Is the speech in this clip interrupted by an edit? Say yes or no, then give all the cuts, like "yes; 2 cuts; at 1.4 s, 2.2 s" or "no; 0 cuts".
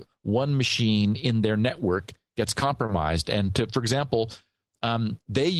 no; 0 cuts